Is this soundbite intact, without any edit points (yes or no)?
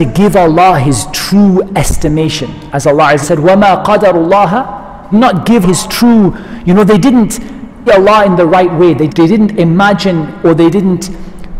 no